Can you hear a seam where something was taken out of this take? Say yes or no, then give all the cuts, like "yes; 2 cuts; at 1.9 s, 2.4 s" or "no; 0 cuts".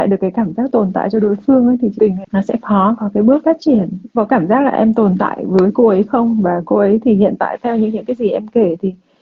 yes; 3 cuts; at 2.0 s, 4.1 s, 6.6 s